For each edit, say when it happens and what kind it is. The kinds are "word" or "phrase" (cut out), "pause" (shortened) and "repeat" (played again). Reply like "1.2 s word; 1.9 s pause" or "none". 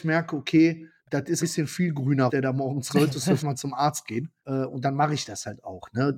1.0 s pause; 1.4 s phrase; 2.3 s word; 2.9 s word; 3.4 s word; 4.4 s pause